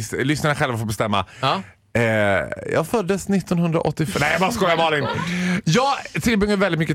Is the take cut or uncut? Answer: uncut